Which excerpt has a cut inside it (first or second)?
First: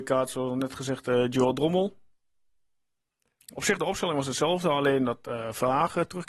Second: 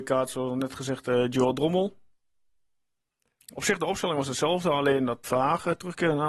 second